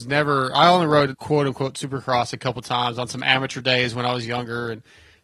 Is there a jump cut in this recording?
yes; 1 cut; at 1.1 s

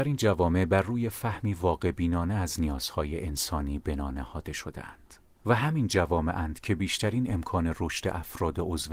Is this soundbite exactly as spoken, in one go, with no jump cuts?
yes; 0 cuts

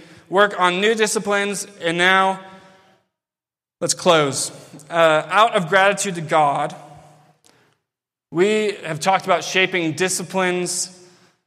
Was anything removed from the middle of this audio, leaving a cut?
no; 0 cuts

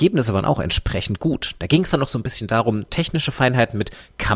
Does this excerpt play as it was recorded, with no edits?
no; 1 cut; at 2.9 s

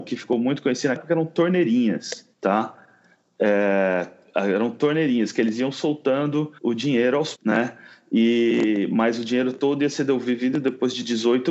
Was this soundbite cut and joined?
yes; 4 cuts; at 1.0 s, 2.3 s, 6.6 s, 7.3 s

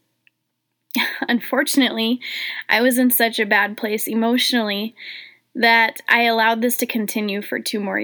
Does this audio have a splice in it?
no; 0 cuts

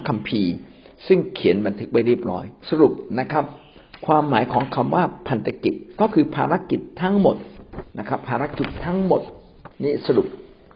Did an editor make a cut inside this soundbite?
yes; 3 cuts; at 2.6 s, 7.9 s, 9.7 s

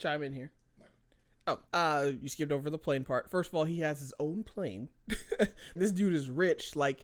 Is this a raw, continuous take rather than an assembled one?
no; 2 cuts; at 1.7 s, 5.8 s

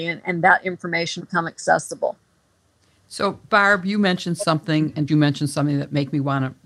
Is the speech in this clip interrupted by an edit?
yes; 2 cuts; at 1.2 s, 5.1 s

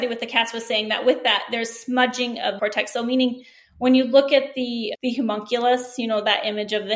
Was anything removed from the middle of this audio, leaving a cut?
yes; 2 cuts; at 2.6 s, 4.9 s

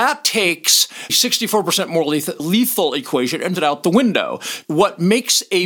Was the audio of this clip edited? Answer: yes; 4 cuts; at 1.1 s, 2.4 s, 3.6 s, 4.6 s

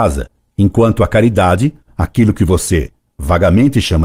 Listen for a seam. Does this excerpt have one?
no; 0 cuts

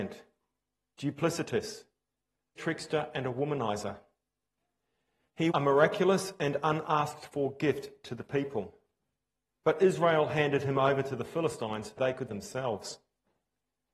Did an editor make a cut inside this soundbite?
yes; 4 cuts; at 2.6 s, 5.5 s, 12.0 s, 12.3 s

